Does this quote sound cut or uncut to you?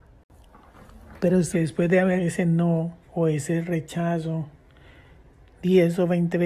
cut